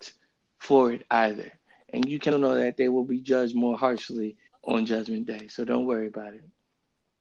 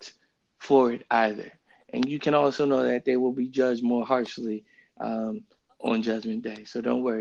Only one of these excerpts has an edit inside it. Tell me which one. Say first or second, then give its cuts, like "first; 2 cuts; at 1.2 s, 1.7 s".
first; 2 cuts; at 2.3 s, 4.5 s